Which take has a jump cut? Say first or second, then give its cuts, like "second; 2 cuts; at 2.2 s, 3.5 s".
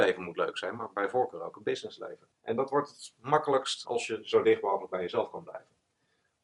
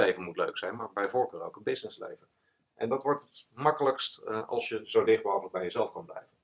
first; 2 cuts; at 2.3 s, 3.9 s